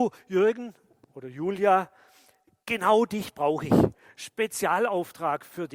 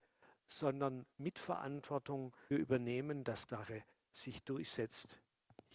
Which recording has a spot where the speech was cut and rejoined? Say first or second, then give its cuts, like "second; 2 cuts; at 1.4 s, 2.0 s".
second; 2 cuts; at 2.5 s, 3.5 s